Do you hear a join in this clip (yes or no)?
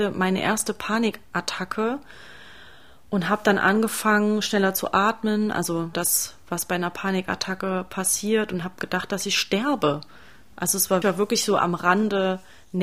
yes